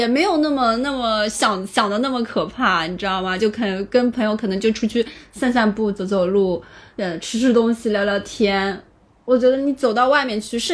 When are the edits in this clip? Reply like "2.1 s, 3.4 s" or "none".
none